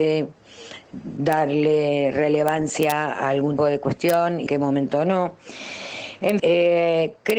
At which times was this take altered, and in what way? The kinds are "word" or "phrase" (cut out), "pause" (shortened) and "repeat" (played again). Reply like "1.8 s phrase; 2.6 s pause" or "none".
3.1 s word; 3.6 s word; 4.5 s word; 6.4 s word